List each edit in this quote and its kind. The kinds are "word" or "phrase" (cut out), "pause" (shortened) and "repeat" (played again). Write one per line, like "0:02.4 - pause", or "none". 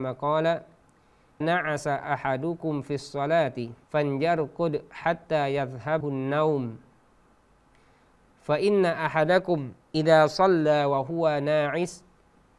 0:01.4 - word
0:03.8 - pause
0:06.0 - word
0:09.8 - pause